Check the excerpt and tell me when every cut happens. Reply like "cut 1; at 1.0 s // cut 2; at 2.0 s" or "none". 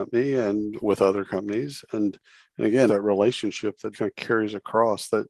cut 1; at 2.9 s // cut 2; at 3.9 s